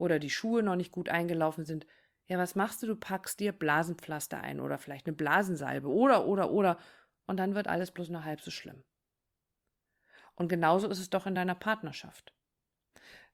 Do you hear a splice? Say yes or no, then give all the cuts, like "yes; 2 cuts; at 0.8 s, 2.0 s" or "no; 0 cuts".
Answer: no; 0 cuts